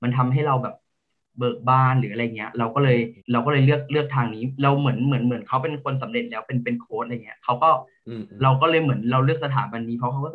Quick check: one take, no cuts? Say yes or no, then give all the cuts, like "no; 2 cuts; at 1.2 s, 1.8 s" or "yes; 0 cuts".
no; 1 cut; at 3.2 s